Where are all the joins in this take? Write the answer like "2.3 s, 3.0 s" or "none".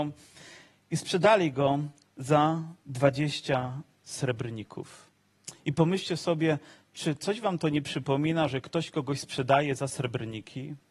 2.8 s